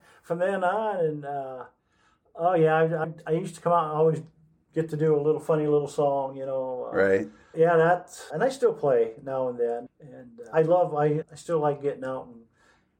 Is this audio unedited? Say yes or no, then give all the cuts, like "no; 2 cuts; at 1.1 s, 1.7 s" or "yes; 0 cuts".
no; 6 cuts; at 3.0 s, 7.5 s, 8.3 s, 9.9 s, 10.5 s, 11.2 s